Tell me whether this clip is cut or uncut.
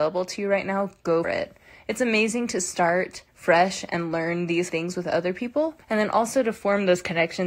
cut